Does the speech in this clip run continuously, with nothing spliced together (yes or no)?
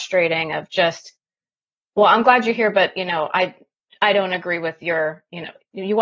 yes